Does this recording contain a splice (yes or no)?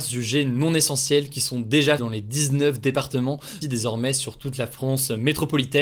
yes